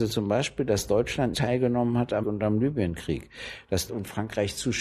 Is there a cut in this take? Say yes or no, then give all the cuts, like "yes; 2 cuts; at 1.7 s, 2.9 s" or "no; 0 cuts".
yes; 3 cuts; at 1.3 s, 2.2 s, 3.9 s